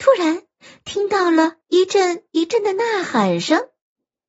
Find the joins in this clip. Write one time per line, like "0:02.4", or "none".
0:01.6